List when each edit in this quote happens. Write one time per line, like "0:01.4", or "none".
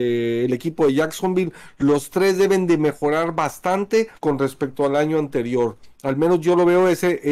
0:04.2